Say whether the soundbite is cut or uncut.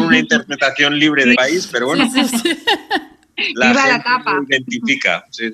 cut